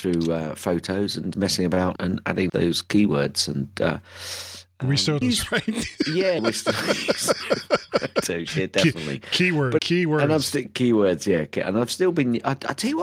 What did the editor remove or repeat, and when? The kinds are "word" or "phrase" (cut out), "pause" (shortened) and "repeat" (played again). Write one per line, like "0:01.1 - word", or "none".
0:01.3 - word
0:02.0 - word
0:02.5 - word
0:05.2 - phrase
0:06.4 - word
0:09.8 - word